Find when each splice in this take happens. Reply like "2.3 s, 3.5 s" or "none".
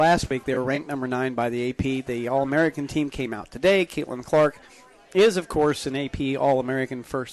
none